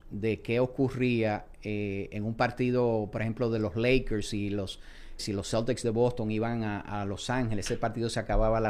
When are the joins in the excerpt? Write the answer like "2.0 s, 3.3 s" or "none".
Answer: 5.2 s